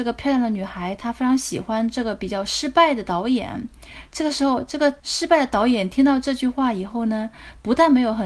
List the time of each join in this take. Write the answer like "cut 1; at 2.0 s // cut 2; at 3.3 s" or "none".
cut 1; at 5.0 s